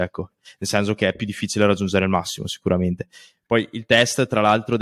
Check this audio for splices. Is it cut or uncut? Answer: uncut